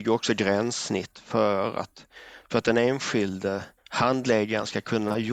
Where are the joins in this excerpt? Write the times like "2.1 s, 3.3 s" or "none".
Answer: 3.8 s